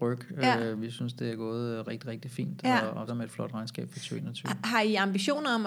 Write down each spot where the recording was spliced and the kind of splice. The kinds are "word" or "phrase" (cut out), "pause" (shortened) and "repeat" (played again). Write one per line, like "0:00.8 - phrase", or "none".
0:03.1 - word